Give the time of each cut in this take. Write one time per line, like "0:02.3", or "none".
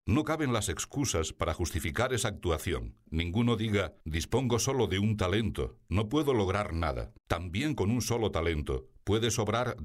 0:03.1
0:04.0
0:07.2